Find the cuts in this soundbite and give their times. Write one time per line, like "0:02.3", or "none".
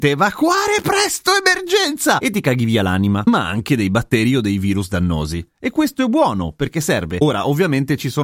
none